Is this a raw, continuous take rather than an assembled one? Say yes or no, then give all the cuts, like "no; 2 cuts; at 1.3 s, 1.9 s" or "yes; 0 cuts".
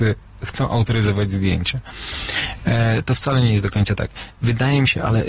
yes; 0 cuts